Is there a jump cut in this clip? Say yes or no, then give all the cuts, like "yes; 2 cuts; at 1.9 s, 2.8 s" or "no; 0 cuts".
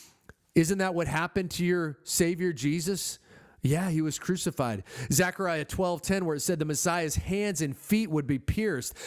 no; 0 cuts